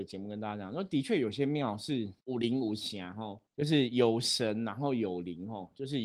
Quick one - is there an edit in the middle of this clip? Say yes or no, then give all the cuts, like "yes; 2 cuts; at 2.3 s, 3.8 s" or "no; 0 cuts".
yes; 2 cuts; at 2.2 s, 3.5 s